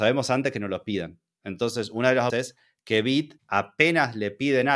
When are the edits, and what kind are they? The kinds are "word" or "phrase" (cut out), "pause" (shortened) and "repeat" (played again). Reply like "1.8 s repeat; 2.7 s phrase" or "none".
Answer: 2.3 s word; 3.4 s pause